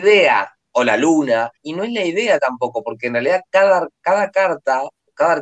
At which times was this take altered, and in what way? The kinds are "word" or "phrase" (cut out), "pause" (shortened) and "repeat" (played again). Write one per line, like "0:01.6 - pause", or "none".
0:01.6 - pause